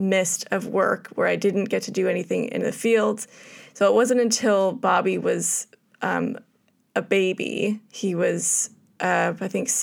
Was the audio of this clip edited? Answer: no; 0 cuts

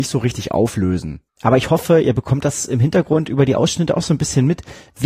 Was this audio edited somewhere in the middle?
no; 0 cuts

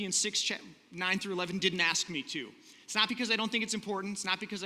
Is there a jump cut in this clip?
no; 0 cuts

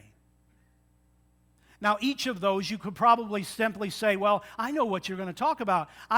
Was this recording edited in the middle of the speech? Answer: no; 0 cuts

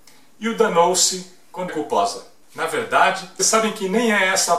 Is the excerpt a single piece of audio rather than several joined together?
no; 3 cuts; at 1.7 s, 2.4 s, 3.4 s

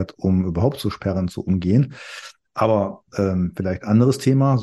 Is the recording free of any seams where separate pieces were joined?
yes; 0 cuts

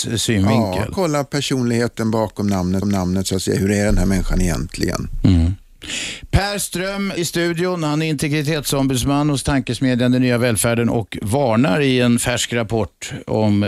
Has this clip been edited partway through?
yes; 2 cuts; at 2.8 s, 7.2 s

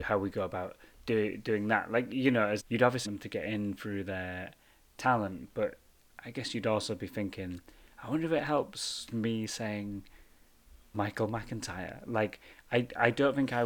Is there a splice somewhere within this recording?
yes; 4 cuts; at 2.6 s, 3.0 s, 9.1 s, 10.9 s

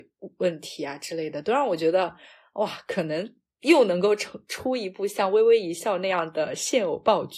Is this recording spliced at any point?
no; 0 cuts

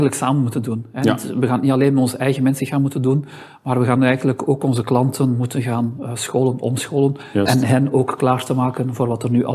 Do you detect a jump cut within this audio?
no; 0 cuts

